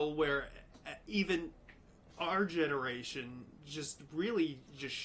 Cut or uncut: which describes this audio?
uncut